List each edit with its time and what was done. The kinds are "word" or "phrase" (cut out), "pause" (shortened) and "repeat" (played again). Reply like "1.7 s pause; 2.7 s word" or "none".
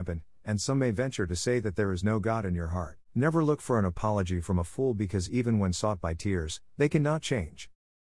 3.0 s pause

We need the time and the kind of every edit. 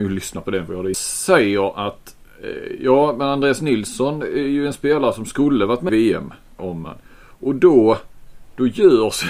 0.9 s phrase; 5.9 s word; 6.6 s word

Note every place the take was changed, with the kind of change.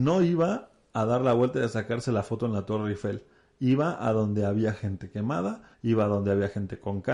5.7 s pause

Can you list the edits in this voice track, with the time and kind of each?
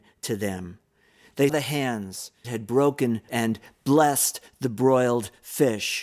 1.5 s word; 2.4 s word; 3.3 s word

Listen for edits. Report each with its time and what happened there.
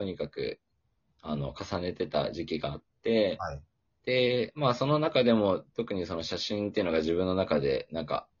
3.9 s pause

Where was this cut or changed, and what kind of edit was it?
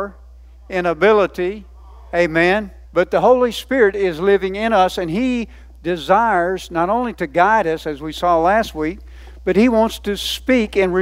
2.8 s pause

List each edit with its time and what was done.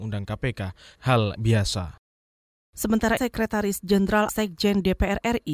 1.0 s word; 1.4 s word; 3.2 s word; 4.3 s word

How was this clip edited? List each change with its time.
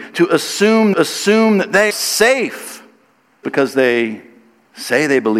0.9 s repeat; 1.9 s word; 3.4 s word

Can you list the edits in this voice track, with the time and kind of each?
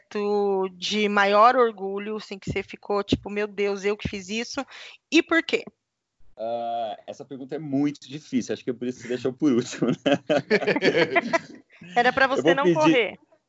6.3 s pause

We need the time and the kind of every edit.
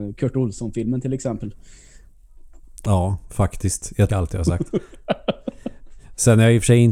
2.6 s pause; 4.1 s phrase

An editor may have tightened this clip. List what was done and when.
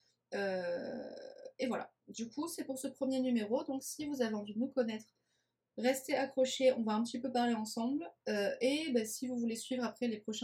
2.0 s pause

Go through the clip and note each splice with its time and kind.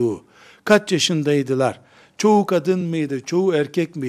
none

